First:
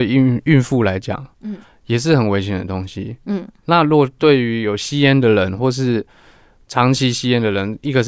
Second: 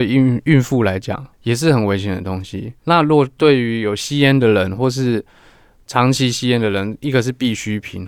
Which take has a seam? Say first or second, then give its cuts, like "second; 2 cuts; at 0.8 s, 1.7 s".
second; 2 cuts; at 1.3 s, 2.8 s